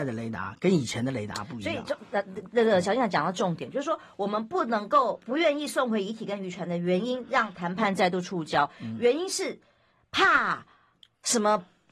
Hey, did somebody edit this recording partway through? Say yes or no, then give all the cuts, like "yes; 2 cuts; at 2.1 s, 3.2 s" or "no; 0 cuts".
no; 0 cuts